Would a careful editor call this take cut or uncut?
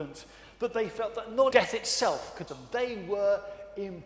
cut